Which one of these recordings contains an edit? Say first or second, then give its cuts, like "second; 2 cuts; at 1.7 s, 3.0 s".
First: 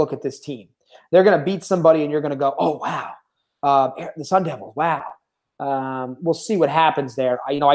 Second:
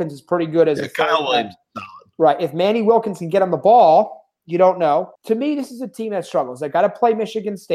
second; 1 cut; at 5.1 s